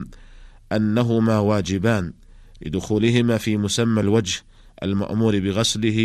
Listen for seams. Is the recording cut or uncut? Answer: uncut